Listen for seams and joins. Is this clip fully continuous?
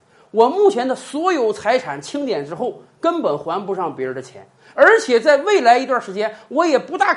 yes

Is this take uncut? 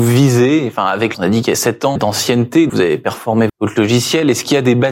no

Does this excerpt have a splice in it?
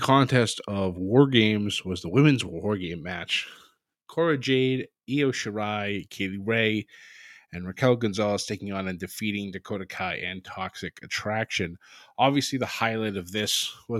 no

